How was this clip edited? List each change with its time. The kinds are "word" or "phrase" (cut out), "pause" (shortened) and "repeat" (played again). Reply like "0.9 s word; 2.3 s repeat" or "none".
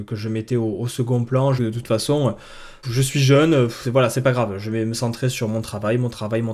1.6 s phrase; 2.8 s word